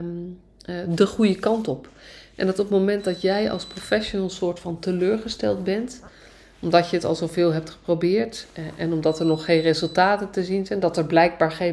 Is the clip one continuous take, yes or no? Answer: yes